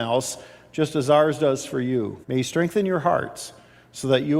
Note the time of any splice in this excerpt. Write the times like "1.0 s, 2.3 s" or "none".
2.2 s